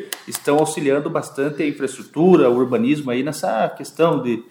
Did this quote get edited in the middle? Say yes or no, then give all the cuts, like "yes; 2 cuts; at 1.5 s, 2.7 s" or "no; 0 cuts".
no; 0 cuts